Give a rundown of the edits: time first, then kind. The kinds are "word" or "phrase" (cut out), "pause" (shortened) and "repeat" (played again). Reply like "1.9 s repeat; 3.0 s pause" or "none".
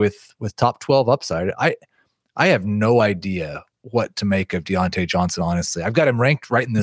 none